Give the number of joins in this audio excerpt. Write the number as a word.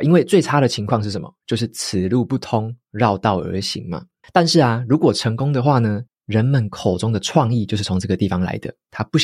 two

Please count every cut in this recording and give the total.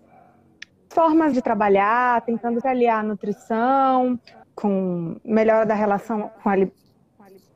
five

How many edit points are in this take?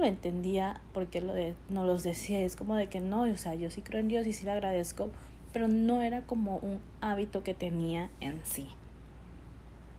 zero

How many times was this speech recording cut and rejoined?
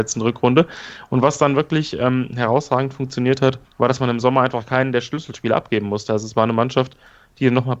one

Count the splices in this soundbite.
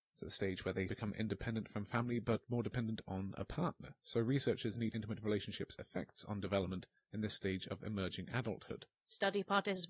two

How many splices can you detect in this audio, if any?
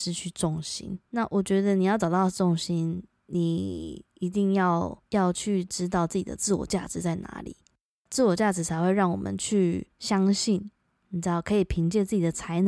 zero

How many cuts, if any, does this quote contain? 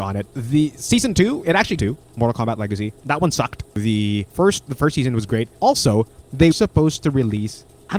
four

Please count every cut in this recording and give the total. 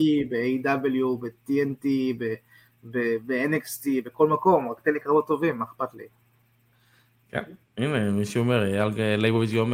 zero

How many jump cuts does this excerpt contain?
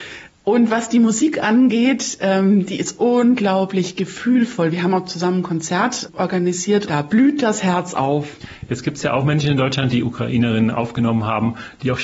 one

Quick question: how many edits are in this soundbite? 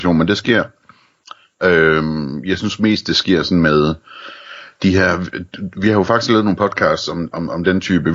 zero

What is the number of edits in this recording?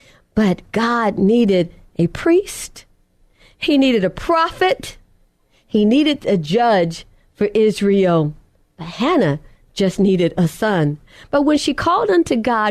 zero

